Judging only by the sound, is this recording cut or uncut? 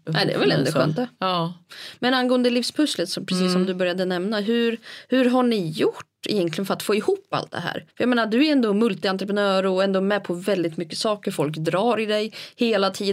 cut